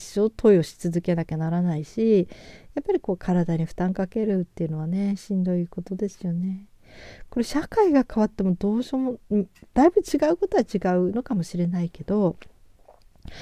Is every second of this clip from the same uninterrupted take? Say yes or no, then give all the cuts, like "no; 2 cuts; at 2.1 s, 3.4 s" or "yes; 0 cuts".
yes; 0 cuts